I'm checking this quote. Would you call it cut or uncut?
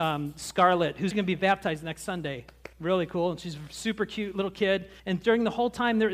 cut